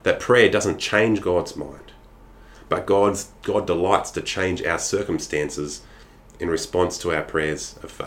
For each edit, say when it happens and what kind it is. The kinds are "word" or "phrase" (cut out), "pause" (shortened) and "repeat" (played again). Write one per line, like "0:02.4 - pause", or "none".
none